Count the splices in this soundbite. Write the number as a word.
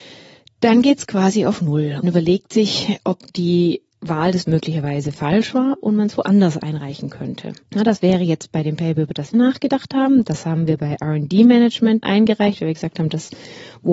five